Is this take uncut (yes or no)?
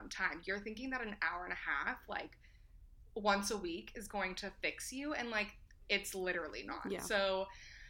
yes